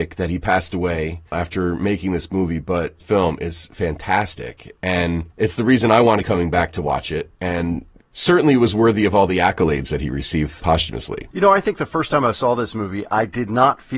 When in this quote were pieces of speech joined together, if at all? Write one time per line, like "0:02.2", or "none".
0:01.3
0:03.0
0:05.3
0:06.2
0:07.3
0:10.6